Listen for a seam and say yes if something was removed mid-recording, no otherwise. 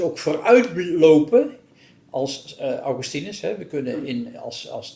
no